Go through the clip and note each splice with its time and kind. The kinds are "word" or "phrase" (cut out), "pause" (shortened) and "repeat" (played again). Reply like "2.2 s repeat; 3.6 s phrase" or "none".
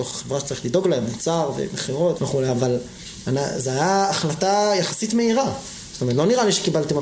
2.2 s word